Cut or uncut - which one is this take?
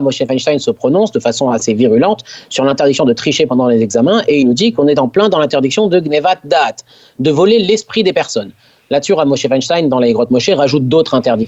uncut